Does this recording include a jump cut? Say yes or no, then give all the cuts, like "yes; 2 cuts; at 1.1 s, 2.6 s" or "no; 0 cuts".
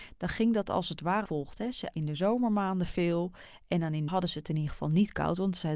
yes; 3 cuts; at 1.3 s, 1.9 s, 4.1 s